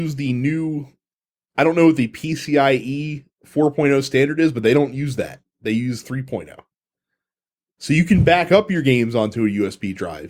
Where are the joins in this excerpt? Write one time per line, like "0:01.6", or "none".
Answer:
none